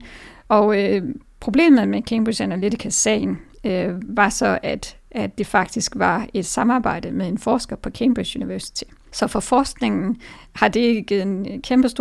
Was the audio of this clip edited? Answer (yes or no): no